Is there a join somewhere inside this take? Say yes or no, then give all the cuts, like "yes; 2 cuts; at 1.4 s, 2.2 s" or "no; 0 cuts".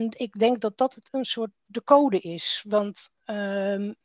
yes; 1 cut; at 1.1 s